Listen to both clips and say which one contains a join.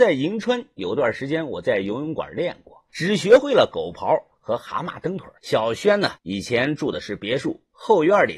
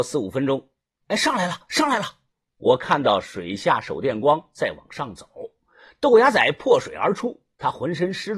first; 3 cuts; at 2.9 s, 5.4 s, 6.2 s

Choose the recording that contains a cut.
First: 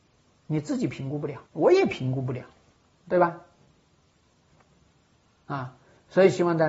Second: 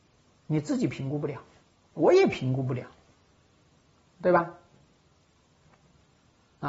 first; 2 cuts; at 1.5 s, 2.8 s

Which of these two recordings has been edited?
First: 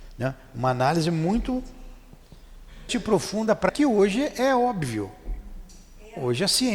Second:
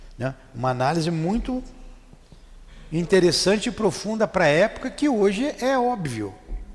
first; 2 cuts; at 2.9 s, 3.7 s

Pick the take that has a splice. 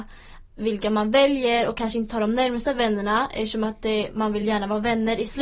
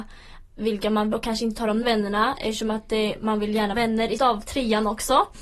second; 4 cuts; at 1.1 s, 1.8 s, 3.7 s, 4.2 s

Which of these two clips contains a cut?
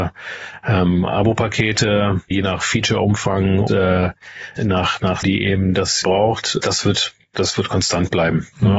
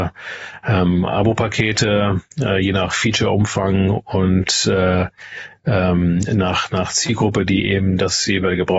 first; 6 cuts; at 2.3 s, 3.7 s, 4.6 s, 5.2 s, 6.0 s, 6.6 s

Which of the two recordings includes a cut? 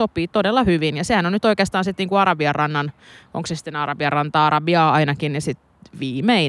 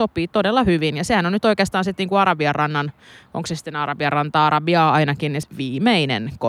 second; 1 cut; at 5.4 s

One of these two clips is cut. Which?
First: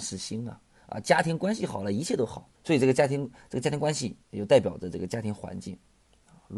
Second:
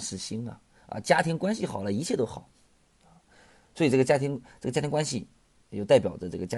first; 2 cuts; at 2.5 s, 4.2 s

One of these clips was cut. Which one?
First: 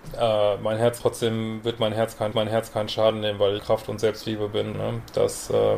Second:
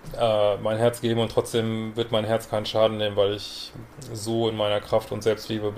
first; 4 cuts; at 1.0 s, 2.3 s, 3.6 s, 4.7 s

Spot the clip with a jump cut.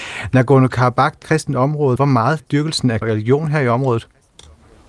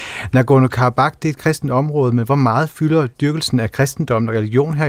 first; 4 cuts; at 1.2 s, 2.0 s, 2.4 s, 3.0 s

